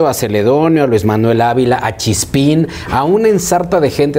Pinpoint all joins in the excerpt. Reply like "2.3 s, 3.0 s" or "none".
none